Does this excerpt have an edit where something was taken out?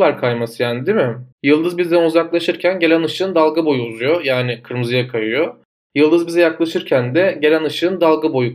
yes; 1 cut; at 1.3 s

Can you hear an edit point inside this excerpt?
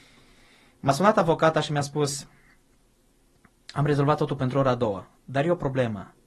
no; 0 cuts

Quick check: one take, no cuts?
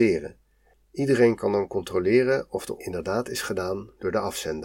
no; 1 cut; at 2.8 s

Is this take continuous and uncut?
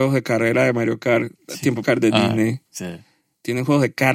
no; 1 cut; at 1.8 s

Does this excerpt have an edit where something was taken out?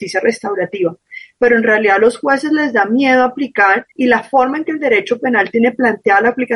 yes; 1 cut; at 3.9 s

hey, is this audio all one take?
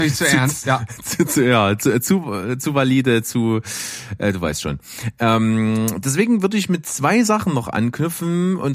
yes; 0 cuts

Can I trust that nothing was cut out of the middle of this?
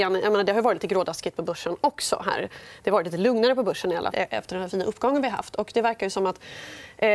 no; 1 cut; at 4.1 s

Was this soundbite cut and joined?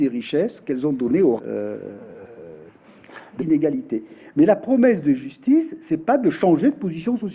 yes; 2 cuts; at 1.4 s, 3.4 s

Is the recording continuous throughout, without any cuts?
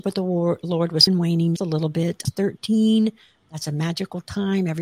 no; 3 cuts; at 1.1 s, 1.6 s, 2.2 s

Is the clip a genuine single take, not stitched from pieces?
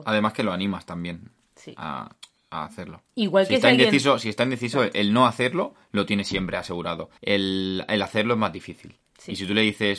no; 2 cuts; at 3.1 s, 7.2 s

